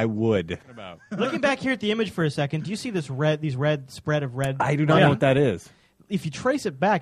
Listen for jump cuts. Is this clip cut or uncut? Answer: uncut